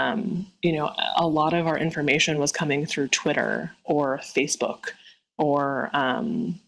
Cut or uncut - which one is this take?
uncut